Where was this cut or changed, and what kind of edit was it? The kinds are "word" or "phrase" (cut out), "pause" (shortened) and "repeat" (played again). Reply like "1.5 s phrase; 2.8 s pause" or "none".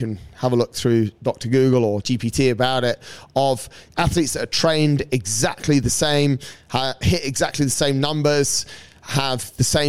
2.0 s word